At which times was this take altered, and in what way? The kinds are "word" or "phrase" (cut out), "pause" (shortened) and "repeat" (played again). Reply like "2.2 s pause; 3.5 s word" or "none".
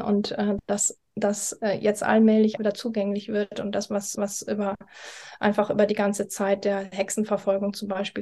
2.6 s word; 4.1 s repeat